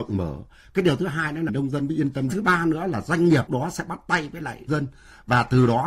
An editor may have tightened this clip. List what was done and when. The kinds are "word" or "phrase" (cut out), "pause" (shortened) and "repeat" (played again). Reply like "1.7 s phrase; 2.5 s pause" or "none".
1.5 s word; 2.3 s phrase; 3.5 s word; 4.7 s word